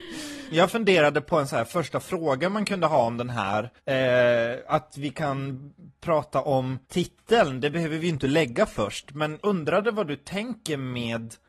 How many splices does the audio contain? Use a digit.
3